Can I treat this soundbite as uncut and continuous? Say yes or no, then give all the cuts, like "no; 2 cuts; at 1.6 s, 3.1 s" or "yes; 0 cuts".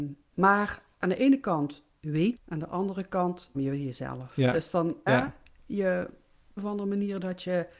no; 4 cuts; at 2.4 s, 3.5 s, 5.1 s, 6.6 s